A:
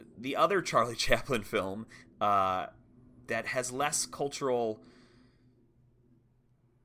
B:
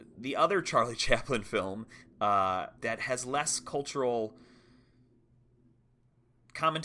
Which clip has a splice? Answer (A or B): B